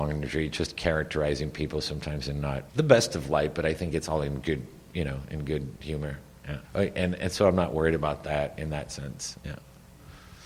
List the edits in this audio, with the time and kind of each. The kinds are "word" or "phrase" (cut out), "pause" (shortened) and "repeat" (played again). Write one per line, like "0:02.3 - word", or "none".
0:02.7 - pause
0:05.8 - pause
0:06.6 - pause

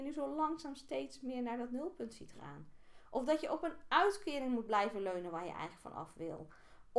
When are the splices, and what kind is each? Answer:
none

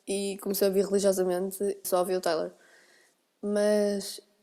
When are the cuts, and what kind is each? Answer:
0:01.8 - word

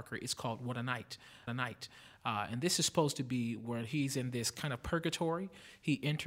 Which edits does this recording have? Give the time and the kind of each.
0:01.5 - repeat

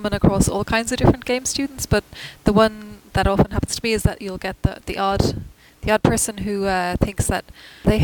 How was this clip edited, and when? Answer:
0:04.2 - word

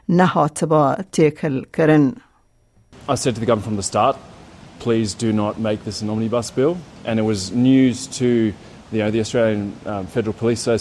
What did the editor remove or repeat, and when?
none

